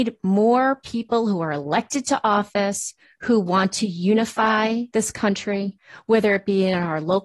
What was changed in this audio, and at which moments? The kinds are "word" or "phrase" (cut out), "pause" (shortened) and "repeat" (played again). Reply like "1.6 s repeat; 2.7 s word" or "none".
none